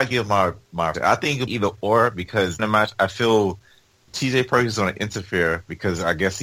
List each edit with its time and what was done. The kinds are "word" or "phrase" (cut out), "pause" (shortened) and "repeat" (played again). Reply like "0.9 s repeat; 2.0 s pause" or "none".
0.9 s word; 1.5 s word; 2.6 s word; 4.1 s word